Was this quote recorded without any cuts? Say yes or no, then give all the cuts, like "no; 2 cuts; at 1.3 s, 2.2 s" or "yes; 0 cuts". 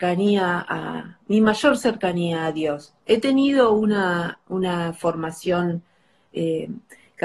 yes; 0 cuts